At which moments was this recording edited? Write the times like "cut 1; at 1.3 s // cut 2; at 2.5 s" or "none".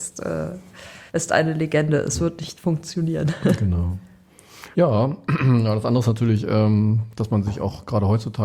cut 1; at 1.1 s // cut 2; at 4.7 s